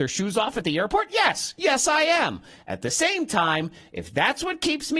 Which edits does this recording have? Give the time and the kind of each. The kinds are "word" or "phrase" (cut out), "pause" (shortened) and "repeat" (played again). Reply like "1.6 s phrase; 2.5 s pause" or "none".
none